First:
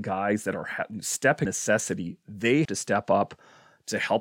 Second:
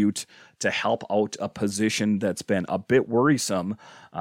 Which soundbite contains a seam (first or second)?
first